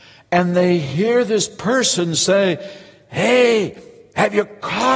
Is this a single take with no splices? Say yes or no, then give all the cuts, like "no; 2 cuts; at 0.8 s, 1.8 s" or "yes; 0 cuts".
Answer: yes; 0 cuts